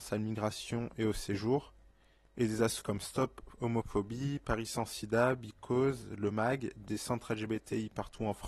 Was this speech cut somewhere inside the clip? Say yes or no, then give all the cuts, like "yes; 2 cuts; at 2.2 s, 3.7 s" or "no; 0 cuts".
yes; 1 cut; at 2.8 s